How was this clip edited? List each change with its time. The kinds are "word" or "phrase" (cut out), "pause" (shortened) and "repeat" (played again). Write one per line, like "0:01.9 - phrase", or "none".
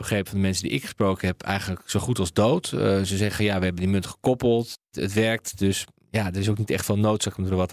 none